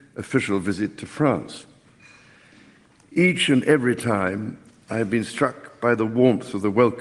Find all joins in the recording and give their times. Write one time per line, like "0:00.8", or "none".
none

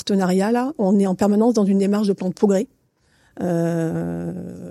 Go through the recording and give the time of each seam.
none

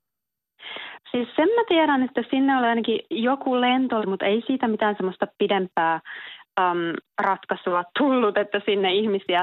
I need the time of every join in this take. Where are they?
0:03.1
0:04.0
0:07.9

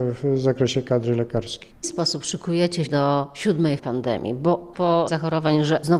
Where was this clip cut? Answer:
0:01.8
0:02.8
0:03.8
0:04.7
0:05.1

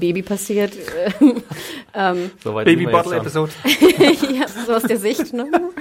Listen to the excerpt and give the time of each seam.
0:04.5

